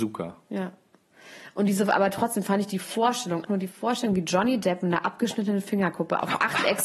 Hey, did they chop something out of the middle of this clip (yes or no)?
yes